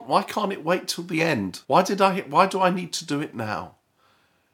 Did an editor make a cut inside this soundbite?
yes; 1 cut; at 1.6 s

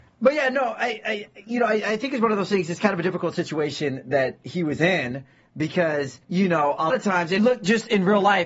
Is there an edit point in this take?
yes; 3 cuts; at 6.2 s, 6.9 s, 7.4 s

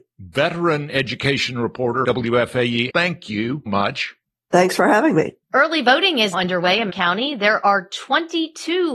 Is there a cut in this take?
yes; 7 cuts; at 2.0 s, 2.9 s, 3.7 s, 4.2 s, 5.4 s, 6.3 s, 6.9 s

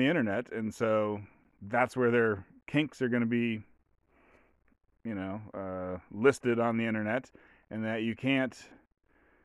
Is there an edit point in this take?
no; 0 cuts

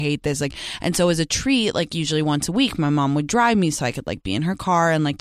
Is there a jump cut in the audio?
no; 0 cuts

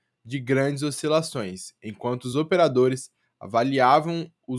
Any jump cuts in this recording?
no; 0 cuts

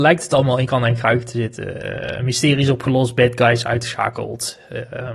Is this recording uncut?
yes; 0 cuts

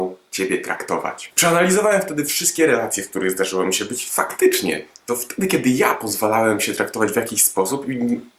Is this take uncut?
yes; 0 cuts

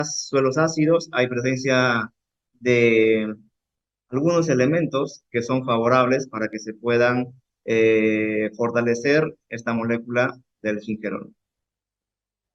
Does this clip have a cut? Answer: no; 0 cuts

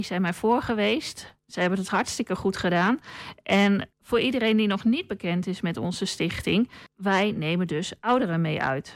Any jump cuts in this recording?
yes; 2 cuts; at 3.9 s, 6.9 s

